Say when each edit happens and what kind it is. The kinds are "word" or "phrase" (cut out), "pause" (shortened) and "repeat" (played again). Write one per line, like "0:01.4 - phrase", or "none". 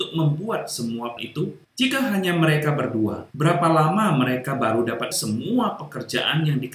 0:01.2 - word
0:01.6 - pause
0:03.3 - pause
0:05.1 - word